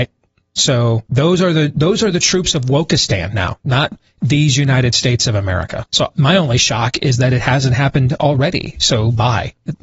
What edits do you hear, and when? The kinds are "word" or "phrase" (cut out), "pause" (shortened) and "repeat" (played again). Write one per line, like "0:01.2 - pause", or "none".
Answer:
0:01.1 - pause
0:05.9 - pause